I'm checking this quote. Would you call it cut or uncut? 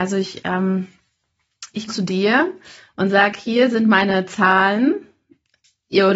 cut